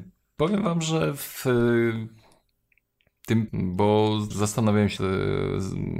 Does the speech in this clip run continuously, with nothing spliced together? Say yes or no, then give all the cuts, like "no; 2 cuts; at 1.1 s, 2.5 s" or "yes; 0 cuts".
no; 3 cuts; at 3.5 s, 4.3 s, 5.0 s